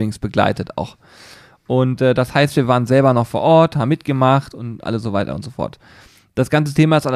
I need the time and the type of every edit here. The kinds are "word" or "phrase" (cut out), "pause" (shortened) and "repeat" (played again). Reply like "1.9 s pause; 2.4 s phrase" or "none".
none